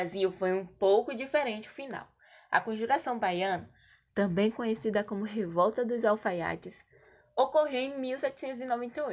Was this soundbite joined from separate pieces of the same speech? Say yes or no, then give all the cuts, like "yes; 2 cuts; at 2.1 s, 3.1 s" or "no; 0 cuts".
no; 0 cuts